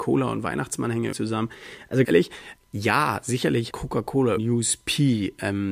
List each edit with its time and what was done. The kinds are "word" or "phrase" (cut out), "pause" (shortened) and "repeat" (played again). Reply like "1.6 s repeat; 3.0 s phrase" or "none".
1.1 s word; 2.0 s word; 2.6 s word; 3.7 s word; 4.4 s word

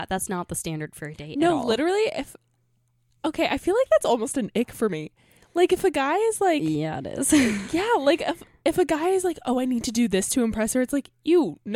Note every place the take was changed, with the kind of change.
none

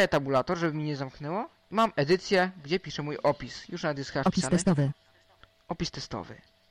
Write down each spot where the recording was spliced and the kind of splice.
none

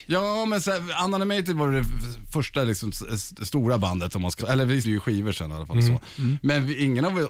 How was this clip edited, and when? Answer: 4.4 s word; 4.8 s word

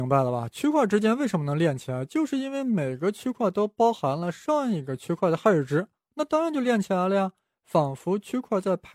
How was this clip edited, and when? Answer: none

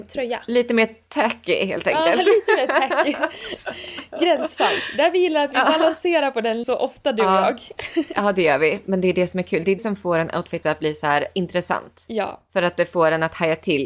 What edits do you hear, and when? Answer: 6.6 s word; 9.8 s word; 10.6 s word

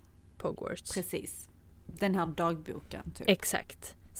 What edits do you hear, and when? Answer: none

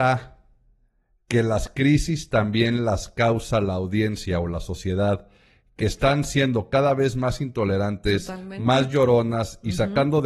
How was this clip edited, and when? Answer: none

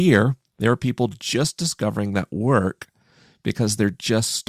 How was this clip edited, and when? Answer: none

